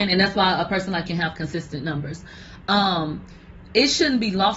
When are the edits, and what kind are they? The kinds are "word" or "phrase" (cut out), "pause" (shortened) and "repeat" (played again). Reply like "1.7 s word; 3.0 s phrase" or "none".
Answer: 1.0 s word